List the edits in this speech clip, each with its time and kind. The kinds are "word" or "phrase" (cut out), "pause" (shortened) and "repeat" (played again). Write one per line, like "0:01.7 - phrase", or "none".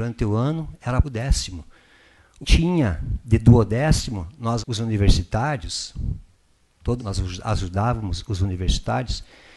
0:01.0 - word
0:02.4 - word
0:04.6 - word
0:07.0 - word